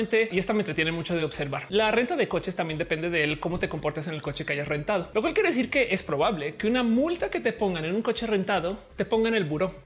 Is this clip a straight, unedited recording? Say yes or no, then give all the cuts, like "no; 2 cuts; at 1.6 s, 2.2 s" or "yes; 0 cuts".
yes; 0 cuts